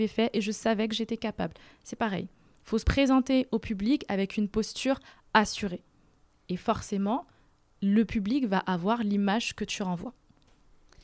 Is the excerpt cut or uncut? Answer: uncut